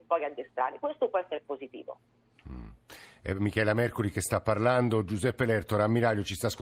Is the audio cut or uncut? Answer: uncut